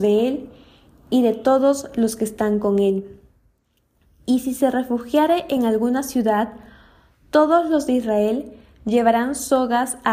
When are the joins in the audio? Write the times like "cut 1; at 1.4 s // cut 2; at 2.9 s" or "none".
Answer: none